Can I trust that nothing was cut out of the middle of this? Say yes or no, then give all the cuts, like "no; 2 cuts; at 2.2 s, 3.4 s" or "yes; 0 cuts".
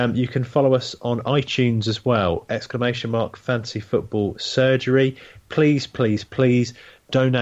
yes; 0 cuts